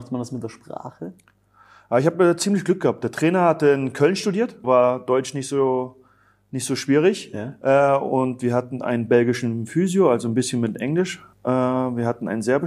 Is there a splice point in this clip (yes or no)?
yes